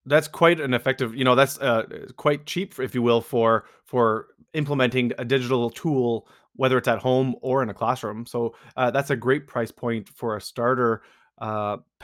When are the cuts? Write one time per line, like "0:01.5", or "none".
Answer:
none